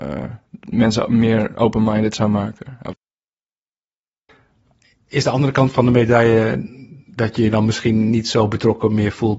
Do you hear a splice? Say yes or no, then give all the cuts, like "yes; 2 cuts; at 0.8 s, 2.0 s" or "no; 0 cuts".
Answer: yes; 1 cut; at 7.0 s